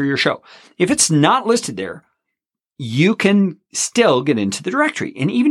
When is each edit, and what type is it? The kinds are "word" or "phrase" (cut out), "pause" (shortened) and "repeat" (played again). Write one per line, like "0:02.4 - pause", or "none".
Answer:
none